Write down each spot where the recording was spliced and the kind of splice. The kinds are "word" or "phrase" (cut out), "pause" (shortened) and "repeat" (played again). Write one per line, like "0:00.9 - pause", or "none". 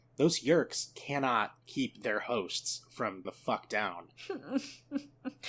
0:01.6 - pause
0:03.2 - word